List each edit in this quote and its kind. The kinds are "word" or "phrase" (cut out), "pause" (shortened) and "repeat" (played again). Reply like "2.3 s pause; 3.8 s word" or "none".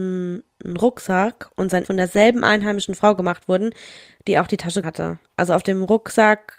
1.8 s word; 4.8 s word